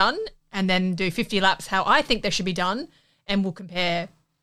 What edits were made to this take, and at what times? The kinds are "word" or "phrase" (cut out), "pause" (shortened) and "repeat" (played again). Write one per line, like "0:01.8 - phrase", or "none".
none